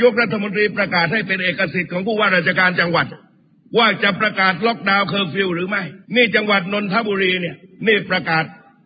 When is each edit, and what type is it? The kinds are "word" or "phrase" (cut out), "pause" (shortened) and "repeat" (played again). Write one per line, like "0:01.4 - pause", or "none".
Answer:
0:03.5 - pause
0:06.0 - pause